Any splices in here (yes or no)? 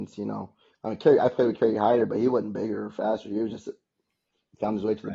no